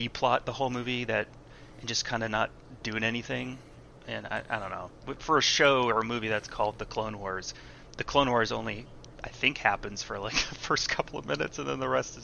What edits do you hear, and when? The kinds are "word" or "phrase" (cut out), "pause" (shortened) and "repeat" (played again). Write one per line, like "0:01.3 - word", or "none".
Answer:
0:05.2 - word

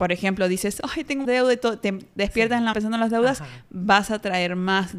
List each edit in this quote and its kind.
0:01.2 - word
0:02.7 - word

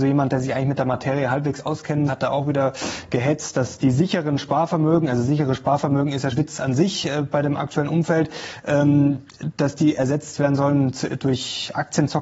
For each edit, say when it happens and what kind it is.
0:02.1 - word
0:06.3 - word

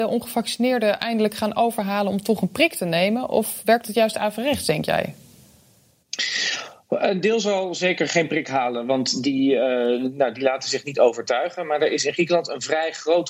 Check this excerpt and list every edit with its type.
none

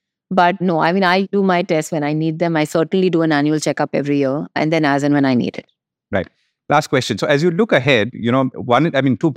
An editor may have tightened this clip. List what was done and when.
none

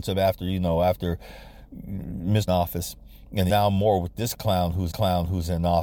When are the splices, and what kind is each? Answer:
0:02.5 - phrase
0:03.5 - word
0:04.9 - repeat

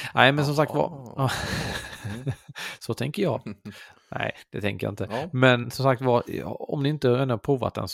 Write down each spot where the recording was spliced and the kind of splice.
0:05.6 - word

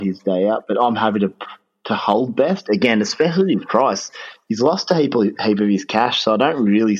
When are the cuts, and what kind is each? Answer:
none

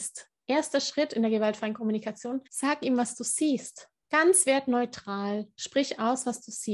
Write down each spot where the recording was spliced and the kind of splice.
0:02.5 - pause
0:04.0 - pause

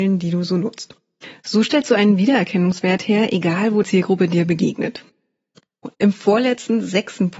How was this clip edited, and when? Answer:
0:03.8 - word
0:05.9 - pause

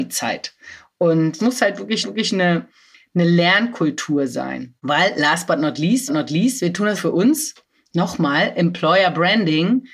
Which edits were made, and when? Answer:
0:01.4 - phrase
0:02.0 - repeat
0:04.8 - pause
0:06.1 - repeat
0:07.0 - phrase
0:07.7 - pause

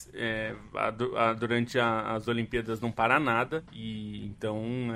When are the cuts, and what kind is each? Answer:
0:03.7 - pause

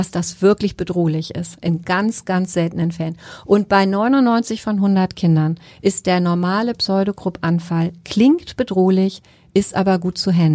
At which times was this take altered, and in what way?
none

